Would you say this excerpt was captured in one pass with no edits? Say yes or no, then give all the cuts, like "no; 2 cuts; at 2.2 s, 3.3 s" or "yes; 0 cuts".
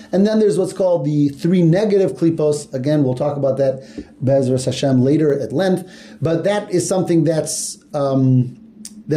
yes; 0 cuts